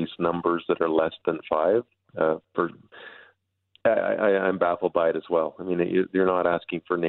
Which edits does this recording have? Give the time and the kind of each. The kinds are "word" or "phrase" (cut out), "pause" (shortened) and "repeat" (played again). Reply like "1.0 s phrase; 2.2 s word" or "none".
2.4 s pause